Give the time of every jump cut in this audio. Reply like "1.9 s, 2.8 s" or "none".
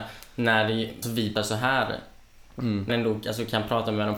1.0 s, 1.4 s, 2.9 s